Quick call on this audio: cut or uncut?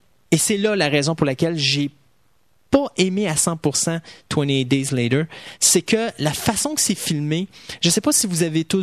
uncut